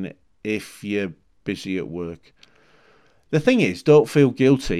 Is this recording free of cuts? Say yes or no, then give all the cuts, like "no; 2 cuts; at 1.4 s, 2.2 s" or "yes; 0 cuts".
yes; 0 cuts